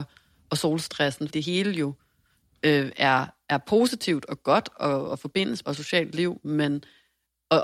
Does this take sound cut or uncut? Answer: cut